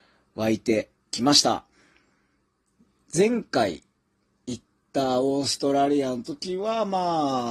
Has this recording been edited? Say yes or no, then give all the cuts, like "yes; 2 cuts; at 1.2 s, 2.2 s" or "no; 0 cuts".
no; 0 cuts